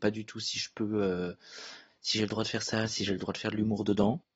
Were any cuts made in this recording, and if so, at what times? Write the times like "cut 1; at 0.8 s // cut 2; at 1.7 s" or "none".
none